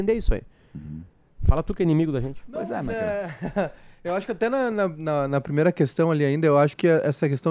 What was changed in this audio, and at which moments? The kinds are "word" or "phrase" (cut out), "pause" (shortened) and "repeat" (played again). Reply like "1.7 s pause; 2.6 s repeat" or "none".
none